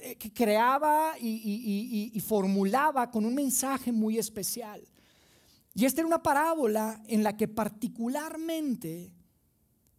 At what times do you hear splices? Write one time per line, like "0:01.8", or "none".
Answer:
none

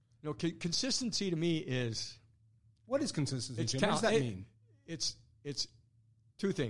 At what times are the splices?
none

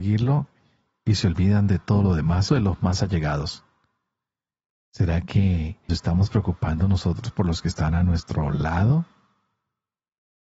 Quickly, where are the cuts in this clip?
0:02.5
0:05.9

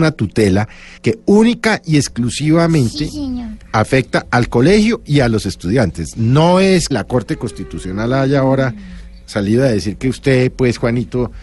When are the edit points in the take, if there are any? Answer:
0:01.0
0:06.9

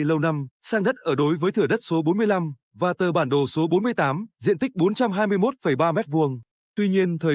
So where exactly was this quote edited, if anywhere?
0:04.3

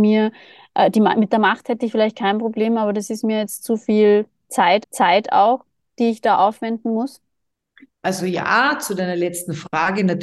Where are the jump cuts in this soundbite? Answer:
0:04.8

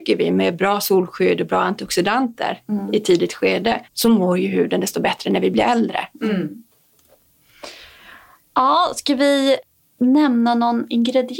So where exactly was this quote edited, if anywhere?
0:03.8

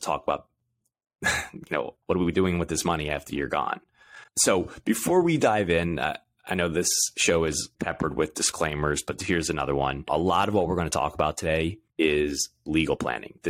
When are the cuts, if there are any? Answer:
0:02.0
0:04.3
0:07.7
0:11.9

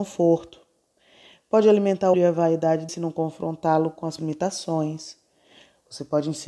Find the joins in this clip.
0:02.1
0:02.9
0:04.2

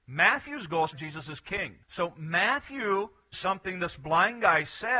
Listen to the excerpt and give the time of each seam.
0:00.9
0:01.8
0:03.3

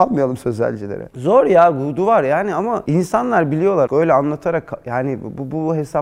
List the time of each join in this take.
0:03.9

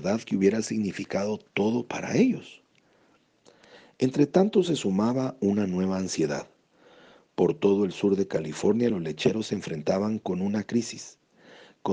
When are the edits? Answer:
none

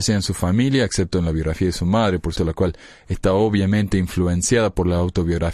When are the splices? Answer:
0:02.4

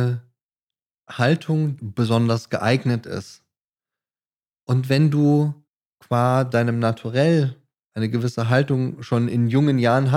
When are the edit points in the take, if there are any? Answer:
0:01.8

